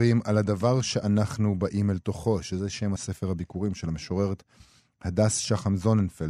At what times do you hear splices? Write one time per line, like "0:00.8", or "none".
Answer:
0:03.0